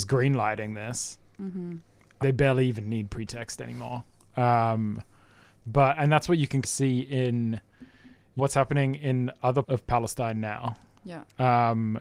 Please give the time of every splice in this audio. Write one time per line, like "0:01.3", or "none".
0:02.2
0:06.6
0:08.4
0:09.6